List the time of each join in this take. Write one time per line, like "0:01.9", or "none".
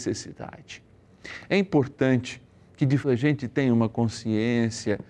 0:03.0